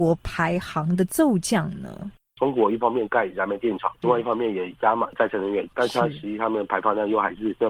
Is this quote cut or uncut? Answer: uncut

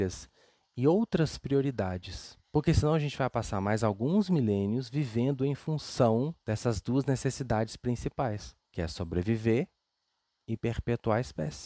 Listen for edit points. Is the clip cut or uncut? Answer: cut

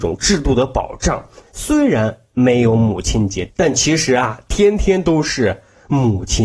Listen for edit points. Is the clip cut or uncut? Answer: uncut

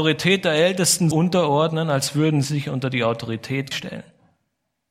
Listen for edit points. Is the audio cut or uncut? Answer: cut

